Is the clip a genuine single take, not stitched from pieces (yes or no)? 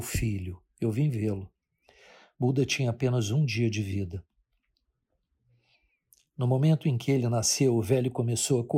yes